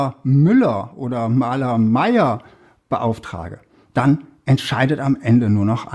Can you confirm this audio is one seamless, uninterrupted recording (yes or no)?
yes